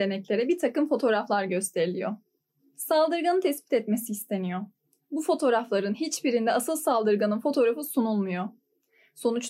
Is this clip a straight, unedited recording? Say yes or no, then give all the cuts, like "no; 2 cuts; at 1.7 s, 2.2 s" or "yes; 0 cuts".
yes; 0 cuts